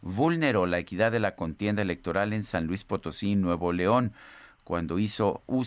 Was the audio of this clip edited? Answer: no; 0 cuts

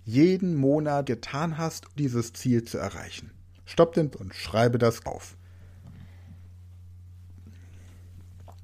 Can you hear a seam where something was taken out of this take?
yes; 4 cuts; at 1.0 s, 2.0 s, 4.1 s, 5.0 s

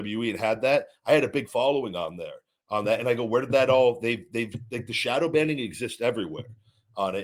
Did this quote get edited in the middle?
no; 0 cuts

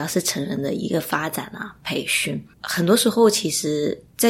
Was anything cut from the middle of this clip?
yes; 1 cut; at 2.5 s

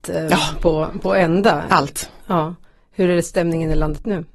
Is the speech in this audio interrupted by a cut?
no; 0 cuts

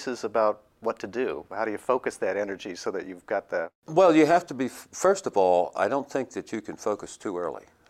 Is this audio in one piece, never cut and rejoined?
yes; 0 cuts

